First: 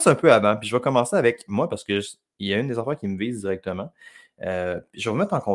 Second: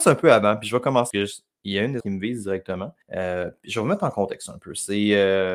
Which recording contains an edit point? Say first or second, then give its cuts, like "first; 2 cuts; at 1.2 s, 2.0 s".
second; 3 cuts; at 1.1 s, 2.0 s, 3.0 s